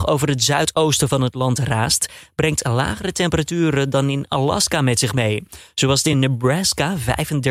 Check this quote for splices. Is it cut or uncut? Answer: uncut